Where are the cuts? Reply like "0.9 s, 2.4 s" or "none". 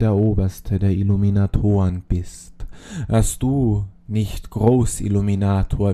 none